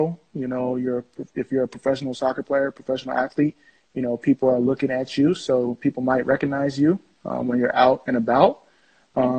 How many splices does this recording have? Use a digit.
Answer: 0